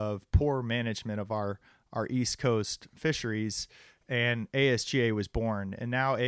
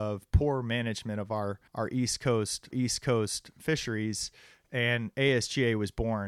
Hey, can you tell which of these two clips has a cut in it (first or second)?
second